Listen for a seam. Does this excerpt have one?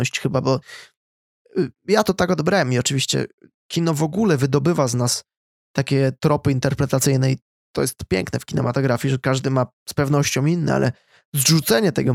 no; 0 cuts

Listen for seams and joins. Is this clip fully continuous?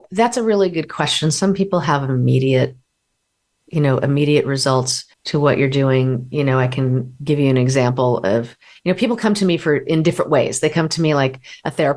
no; 1 cut; at 5.1 s

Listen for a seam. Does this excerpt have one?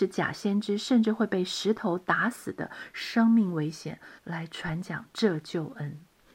yes; 1 cut; at 4.2 s

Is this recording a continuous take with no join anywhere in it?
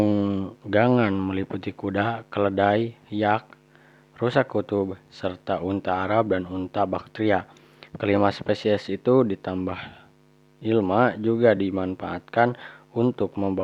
yes; 0 cuts

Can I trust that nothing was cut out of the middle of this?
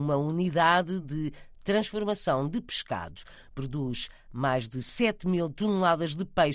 yes; 0 cuts

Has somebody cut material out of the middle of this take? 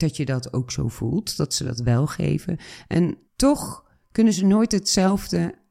yes; 1 cut; at 3.3 s

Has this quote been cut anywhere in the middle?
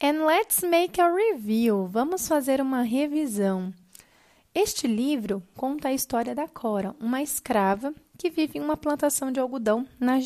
no; 0 cuts

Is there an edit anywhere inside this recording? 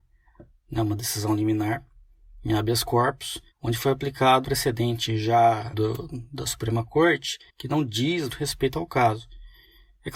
yes; 5 cuts; at 3.5 s, 4.4 s, 5.7 s, 7.5 s, 8.3 s

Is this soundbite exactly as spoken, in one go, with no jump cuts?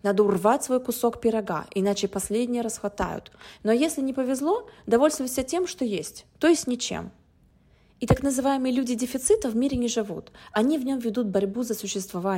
yes; 0 cuts

